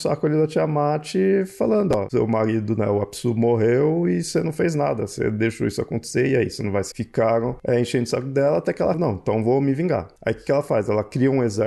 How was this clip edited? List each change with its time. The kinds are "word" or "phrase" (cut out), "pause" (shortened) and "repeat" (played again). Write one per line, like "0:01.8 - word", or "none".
0:06.9 - word
0:08.9 - word